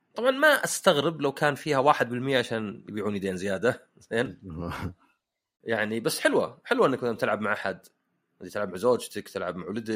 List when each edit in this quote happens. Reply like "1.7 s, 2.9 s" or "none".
none